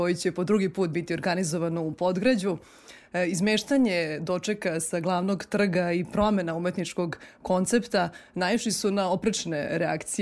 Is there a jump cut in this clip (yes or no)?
no